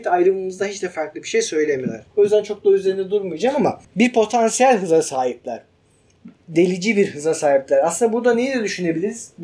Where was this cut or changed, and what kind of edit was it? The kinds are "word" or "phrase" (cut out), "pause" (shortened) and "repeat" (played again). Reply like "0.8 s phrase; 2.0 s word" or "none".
2.1 s pause; 3.9 s pause

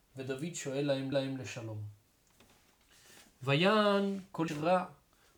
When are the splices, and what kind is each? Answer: 1.1 s repeat; 4.5 s word

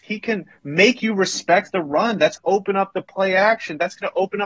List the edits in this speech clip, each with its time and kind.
2.4 s word

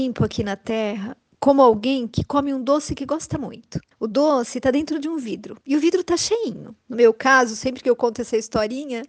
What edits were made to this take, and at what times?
3.9 s pause; 5.6 s pause; 6.8 s pause

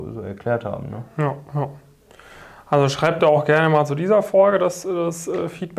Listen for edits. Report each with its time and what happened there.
none

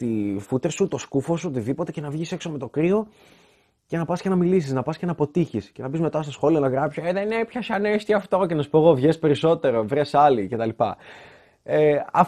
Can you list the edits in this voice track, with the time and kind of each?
none

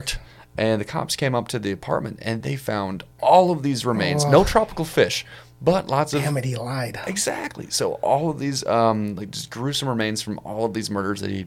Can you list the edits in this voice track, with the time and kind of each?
3.1 s pause

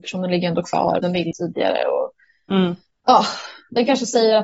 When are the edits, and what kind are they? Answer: 1.0 s word; 1.3 s word; 2.9 s pause

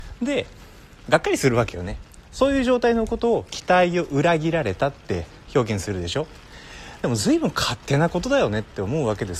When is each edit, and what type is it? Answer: 2.3 s pause

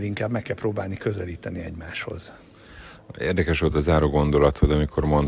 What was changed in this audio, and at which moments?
none

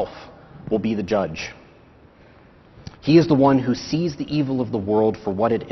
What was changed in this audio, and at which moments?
2.9 s pause

